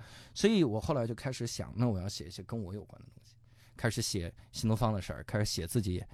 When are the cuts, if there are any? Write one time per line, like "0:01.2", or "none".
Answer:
none